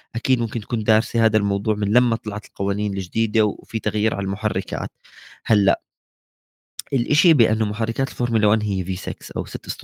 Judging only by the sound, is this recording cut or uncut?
uncut